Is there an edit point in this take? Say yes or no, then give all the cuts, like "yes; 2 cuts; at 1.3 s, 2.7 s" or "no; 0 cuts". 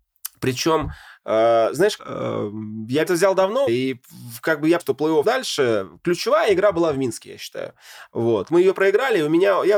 yes; 6 cuts; at 2.0 s, 3.1 s, 3.7 s, 4.8 s, 5.2 s, 8.5 s